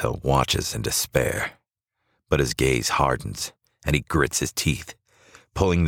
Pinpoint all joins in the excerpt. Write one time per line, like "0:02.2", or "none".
none